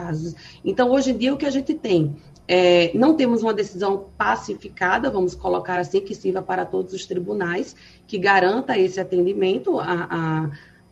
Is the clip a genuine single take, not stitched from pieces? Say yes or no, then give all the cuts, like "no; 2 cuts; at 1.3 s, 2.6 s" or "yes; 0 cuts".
yes; 0 cuts